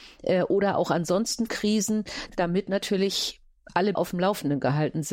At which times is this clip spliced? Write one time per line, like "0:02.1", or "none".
0:01.5
0:04.0